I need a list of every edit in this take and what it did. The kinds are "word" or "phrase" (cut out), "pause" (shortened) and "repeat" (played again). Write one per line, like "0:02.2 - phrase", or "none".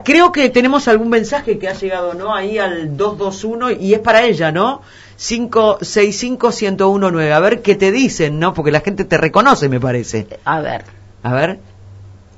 none